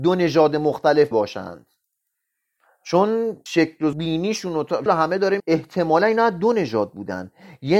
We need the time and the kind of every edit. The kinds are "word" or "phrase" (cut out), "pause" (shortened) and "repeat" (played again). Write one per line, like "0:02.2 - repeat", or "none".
0:01.1 - word
0:03.5 - word
0:03.9 - word
0:04.9 - word
0:05.4 - word